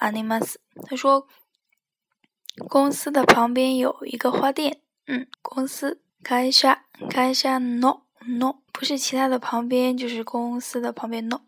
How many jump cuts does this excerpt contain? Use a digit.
3